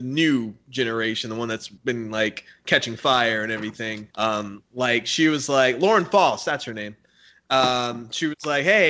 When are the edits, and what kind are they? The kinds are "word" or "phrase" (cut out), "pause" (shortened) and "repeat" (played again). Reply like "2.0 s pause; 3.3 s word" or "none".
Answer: 1.8 s pause; 4.1 s pause